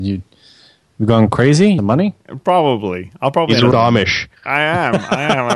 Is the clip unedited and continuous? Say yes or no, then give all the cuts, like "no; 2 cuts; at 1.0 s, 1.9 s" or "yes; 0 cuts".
no; 3 cuts; at 1.8 s, 3.7 s, 4.4 s